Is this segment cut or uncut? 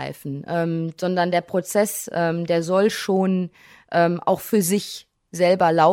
uncut